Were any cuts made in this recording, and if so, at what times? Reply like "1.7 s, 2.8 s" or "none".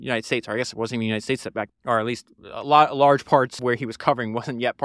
1.7 s, 3.6 s